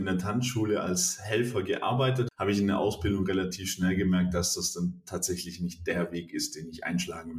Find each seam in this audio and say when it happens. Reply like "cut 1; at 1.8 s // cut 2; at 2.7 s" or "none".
cut 1; at 2.3 s